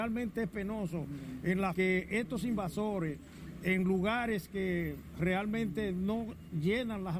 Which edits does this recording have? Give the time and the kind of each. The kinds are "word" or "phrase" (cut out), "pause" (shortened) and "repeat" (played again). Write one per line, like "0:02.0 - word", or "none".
0:01.7 - phrase